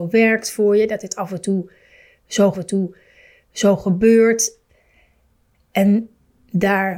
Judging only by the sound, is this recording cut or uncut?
cut